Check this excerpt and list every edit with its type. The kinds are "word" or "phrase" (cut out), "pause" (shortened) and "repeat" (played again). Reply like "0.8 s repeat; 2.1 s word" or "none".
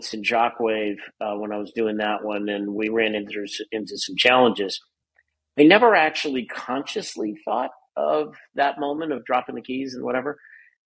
none